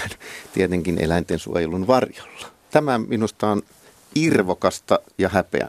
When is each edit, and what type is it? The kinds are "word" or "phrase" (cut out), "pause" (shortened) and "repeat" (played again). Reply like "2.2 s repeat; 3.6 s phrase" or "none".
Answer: none